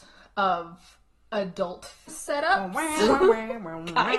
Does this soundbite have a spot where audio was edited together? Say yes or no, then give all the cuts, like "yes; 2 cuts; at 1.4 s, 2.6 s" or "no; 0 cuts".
yes; 1 cut; at 2.1 s